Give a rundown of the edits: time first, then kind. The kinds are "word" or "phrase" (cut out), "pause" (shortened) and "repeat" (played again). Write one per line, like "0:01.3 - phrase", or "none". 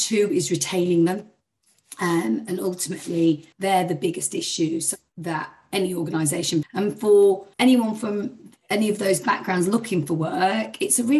0:03.5 - pause
0:06.6 - word
0:07.5 - pause